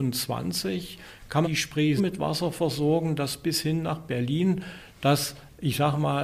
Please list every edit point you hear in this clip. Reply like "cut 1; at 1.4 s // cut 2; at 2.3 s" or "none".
cut 1; at 1.4 s // cut 2; at 2.0 s